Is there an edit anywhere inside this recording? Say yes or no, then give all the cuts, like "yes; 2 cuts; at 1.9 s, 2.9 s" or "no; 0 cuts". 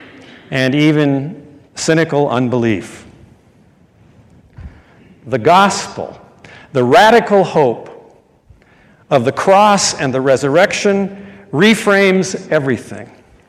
yes; 1 cut; at 1.7 s